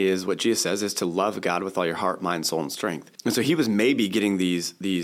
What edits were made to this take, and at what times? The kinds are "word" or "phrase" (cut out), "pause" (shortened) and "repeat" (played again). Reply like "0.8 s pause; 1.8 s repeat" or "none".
3.1 s pause